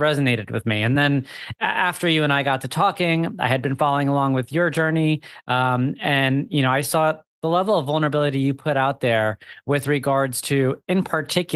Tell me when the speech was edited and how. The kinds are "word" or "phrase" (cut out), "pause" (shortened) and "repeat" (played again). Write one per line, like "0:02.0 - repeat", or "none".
none